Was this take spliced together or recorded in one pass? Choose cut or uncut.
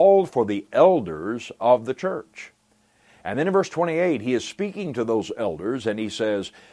uncut